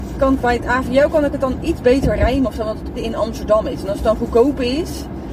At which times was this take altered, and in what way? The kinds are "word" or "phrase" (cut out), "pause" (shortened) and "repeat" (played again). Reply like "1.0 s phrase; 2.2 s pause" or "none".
2.9 s word

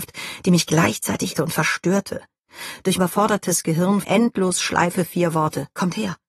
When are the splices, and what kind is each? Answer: 1.4 s word; 3.0 s word; 4.0 s word

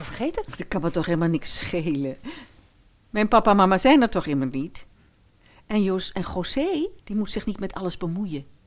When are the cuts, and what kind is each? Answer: 7.0 s pause

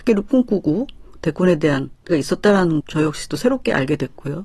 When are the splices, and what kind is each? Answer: 2.1 s word; 2.8 s word

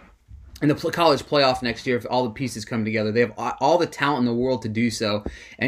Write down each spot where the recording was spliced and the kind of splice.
none

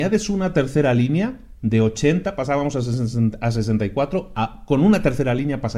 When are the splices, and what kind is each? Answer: none

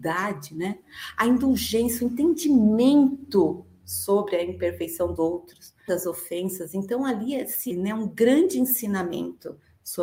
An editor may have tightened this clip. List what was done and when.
5.2 s word; 5.9 s word; 7.7 s word

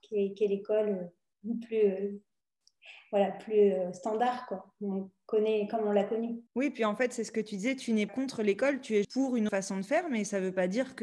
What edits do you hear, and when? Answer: 6.5 s pause; 8.1 s word; 9.0 s word; 9.5 s word

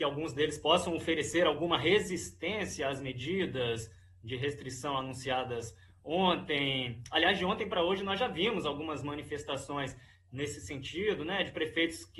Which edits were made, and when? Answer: none

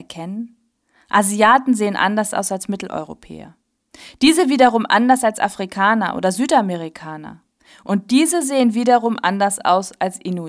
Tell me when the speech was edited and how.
none

